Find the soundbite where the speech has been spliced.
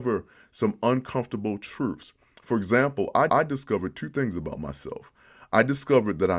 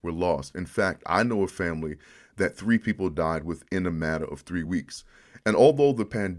first; 1 cut; at 3.3 s

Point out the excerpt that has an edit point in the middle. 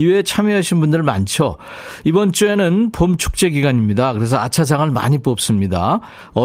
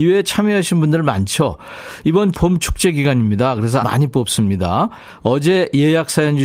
second; 2 cuts; at 2.3 s, 3.8 s

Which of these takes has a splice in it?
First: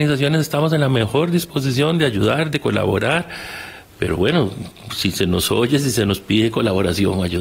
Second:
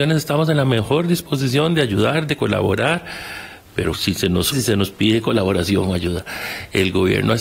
second; 2 cuts; at 3.9 s, 4.5 s

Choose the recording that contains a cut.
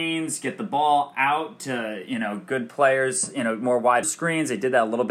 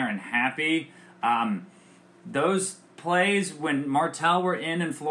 first; 1 cut; at 4.0 s

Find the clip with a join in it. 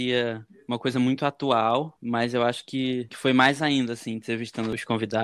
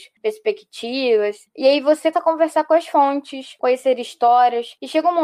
second; 1 cut; at 2.1 s

